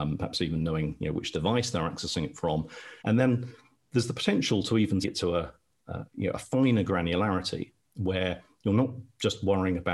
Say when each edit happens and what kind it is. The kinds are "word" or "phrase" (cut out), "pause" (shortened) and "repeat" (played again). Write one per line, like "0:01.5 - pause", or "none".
0:03.0 - pause
0:05.0 - word